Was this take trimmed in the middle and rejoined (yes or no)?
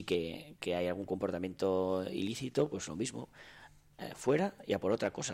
no